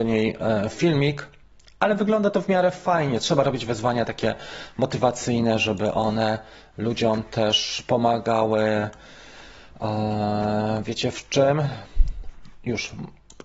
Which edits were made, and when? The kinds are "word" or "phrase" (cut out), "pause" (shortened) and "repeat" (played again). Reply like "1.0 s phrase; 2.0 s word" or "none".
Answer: none